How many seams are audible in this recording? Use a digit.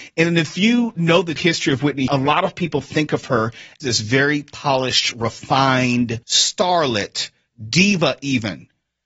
4